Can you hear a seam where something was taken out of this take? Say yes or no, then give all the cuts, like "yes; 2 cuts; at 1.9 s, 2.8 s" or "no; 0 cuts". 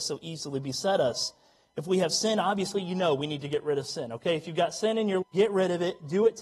yes; 1 cut; at 5.2 s